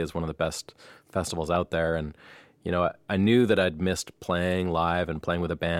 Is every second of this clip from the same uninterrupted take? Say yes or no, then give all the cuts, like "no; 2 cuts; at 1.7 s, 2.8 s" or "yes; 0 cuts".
yes; 0 cuts